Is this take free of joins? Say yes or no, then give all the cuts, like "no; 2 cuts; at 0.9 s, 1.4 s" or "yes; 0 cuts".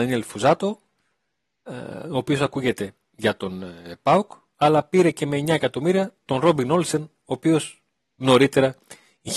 yes; 0 cuts